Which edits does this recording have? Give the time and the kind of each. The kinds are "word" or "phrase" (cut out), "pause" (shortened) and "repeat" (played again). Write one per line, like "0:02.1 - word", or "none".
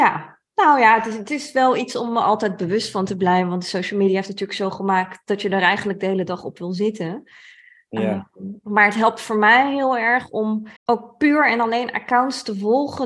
0:10.8 - pause